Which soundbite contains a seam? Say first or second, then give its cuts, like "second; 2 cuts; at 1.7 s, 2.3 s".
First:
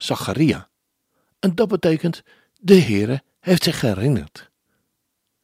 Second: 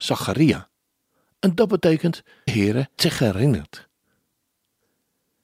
second; 2 cuts; at 2.5 s, 3.0 s